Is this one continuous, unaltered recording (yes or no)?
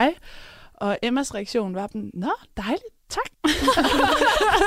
no